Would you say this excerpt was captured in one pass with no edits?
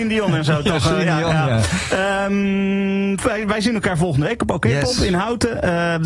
yes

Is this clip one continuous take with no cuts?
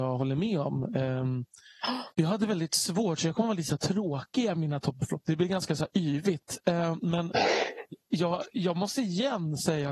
no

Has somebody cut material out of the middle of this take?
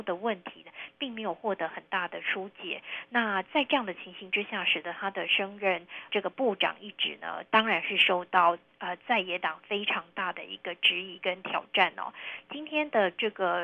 yes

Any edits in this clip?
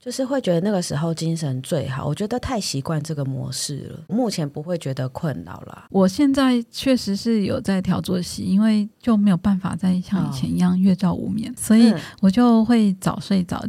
yes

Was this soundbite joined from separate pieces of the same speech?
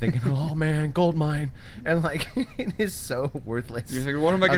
no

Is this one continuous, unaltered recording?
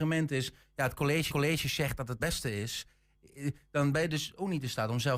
no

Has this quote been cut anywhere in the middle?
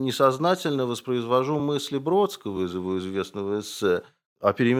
no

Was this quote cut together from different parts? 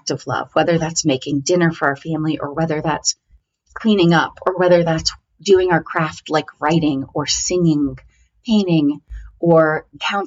no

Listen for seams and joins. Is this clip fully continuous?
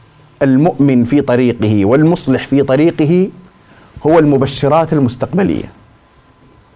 yes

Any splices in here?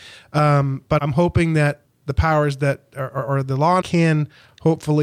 yes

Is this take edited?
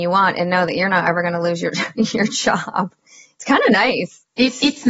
no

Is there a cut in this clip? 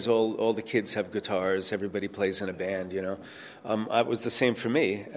no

